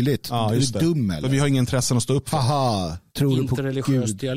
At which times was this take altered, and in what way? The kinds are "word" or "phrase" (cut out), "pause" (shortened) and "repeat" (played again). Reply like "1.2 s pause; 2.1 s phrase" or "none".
3.1 s pause